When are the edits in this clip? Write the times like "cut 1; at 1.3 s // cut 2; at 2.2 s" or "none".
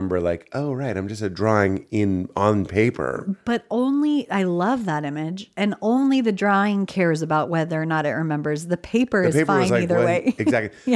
none